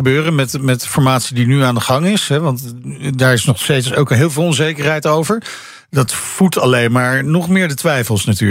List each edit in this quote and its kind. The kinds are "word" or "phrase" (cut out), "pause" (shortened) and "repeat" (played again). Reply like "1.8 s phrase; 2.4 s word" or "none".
6.1 s word